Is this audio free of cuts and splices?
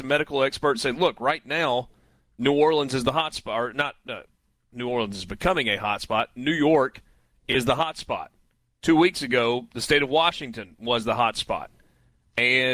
yes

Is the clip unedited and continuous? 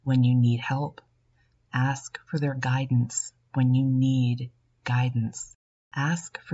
yes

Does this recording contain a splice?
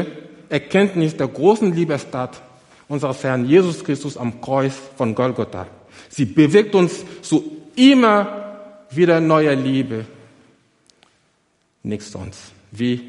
no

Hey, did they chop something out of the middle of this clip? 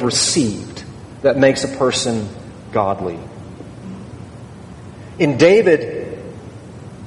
no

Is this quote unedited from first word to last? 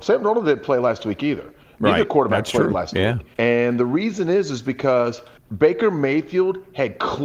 no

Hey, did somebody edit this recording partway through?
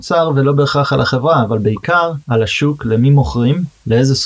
yes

